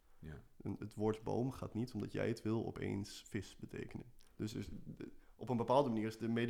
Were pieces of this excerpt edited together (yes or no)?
yes